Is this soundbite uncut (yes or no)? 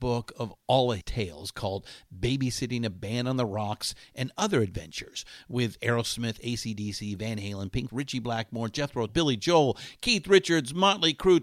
no